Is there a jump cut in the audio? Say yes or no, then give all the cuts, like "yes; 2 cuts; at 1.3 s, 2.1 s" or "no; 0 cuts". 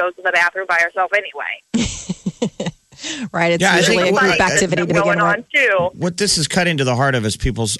no; 0 cuts